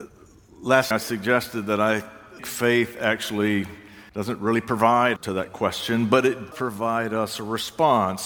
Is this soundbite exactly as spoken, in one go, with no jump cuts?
no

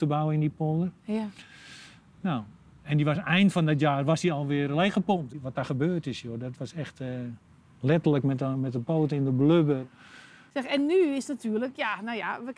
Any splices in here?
no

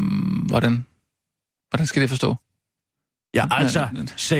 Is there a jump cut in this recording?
no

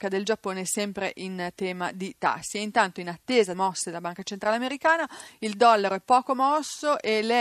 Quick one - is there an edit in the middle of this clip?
yes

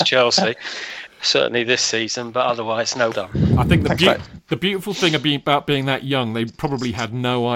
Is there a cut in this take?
yes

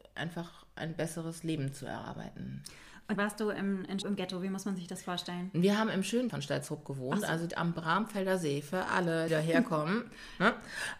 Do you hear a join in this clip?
yes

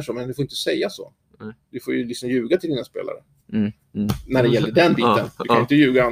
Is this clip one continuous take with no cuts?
yes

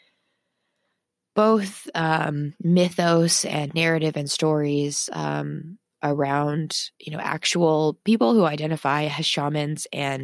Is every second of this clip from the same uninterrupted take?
no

